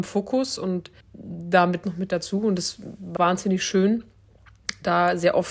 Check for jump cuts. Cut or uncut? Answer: cut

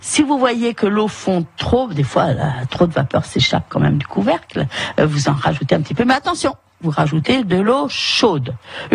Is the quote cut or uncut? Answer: uncut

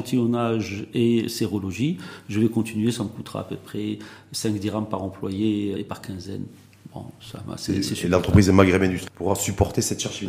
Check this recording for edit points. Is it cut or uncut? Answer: cut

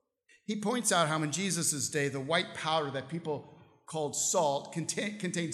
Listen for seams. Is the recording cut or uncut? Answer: uncut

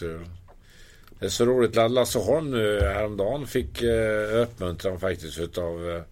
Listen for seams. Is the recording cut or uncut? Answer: uncut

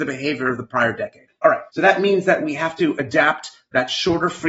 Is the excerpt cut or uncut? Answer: cut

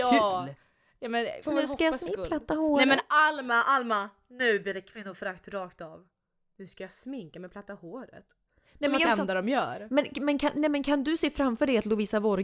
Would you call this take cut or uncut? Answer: cut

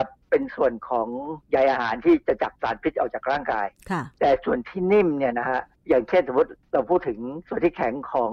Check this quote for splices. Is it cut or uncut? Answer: cut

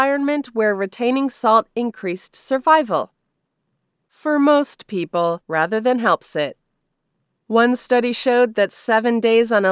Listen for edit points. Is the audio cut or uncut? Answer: cut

